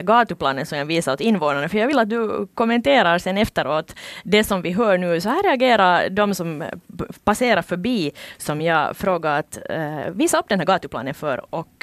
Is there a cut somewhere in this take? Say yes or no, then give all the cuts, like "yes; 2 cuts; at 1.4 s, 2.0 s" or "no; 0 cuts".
no; 0 cuts